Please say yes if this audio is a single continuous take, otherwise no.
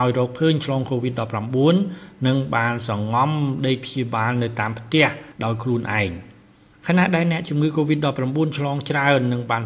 yes